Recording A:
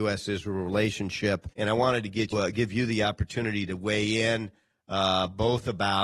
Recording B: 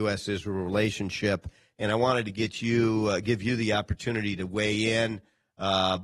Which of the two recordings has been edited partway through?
A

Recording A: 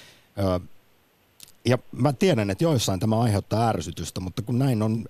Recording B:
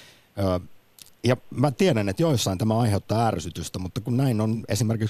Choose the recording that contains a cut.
B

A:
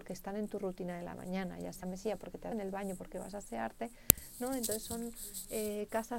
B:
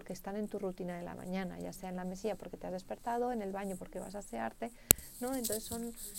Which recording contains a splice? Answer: A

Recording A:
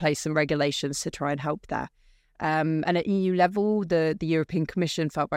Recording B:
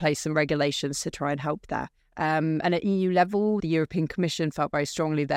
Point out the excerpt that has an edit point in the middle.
B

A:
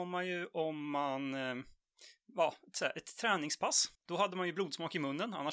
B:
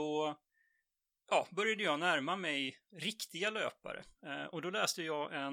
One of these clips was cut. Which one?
A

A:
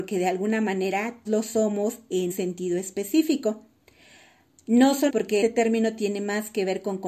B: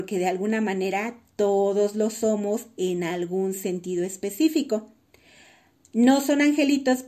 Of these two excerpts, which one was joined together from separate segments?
A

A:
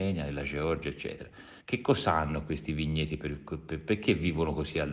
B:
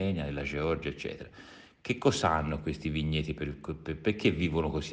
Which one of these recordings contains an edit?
A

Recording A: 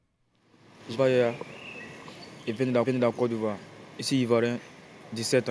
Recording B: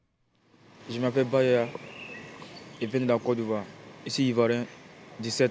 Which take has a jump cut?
A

